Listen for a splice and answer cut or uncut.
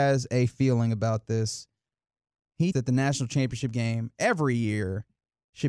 cut